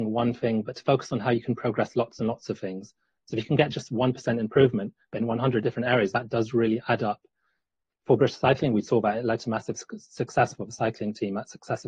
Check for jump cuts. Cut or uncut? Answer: uncut